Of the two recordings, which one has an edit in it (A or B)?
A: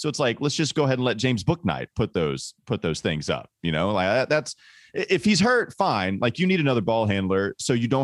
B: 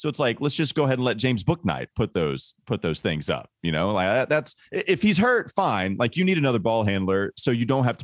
B